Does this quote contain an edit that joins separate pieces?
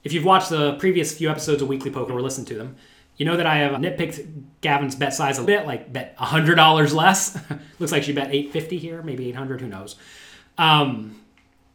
yes; 3 cuts; at 2.1 s, 3.7 s, 5.4 s

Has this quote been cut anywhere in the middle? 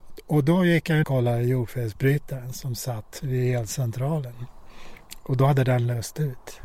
yes; 1 cut; at 1.0 s

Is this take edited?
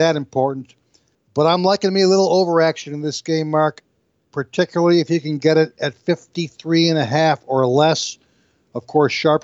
no; 0 cuts

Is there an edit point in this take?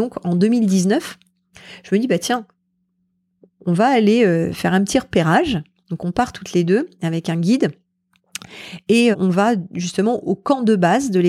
yes; 2 cuts; at 9.1 s, 10.2 s

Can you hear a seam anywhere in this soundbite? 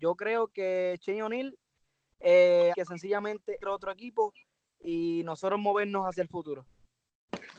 yes; 2 cuts; at 2.7 s, 3.6 s

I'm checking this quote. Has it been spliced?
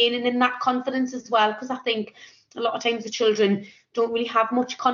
no; 0 cuts

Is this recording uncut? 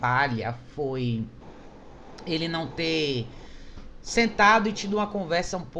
yes; 0 cuts

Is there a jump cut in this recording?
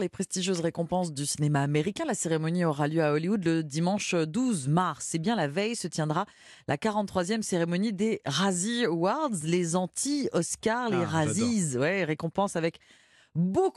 no; 0 cuts

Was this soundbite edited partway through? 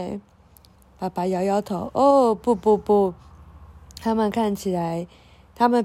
no; 0 cuts

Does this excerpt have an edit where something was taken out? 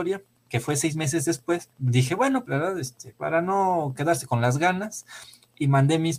yes; 3 cuts; at 1.7 s, 2.5 s, 3.1 s

